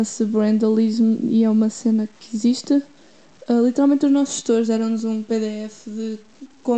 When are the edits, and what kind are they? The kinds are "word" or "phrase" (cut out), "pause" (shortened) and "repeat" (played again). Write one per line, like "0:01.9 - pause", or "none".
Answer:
0:02.2 - pause